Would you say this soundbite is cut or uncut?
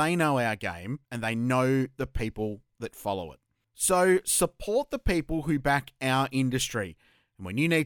cut